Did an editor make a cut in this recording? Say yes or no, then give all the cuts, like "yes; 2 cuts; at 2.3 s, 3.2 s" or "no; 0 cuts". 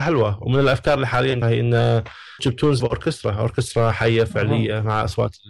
yes; 3 cuts; at 1.4 s, 2.4 s, 2.8 s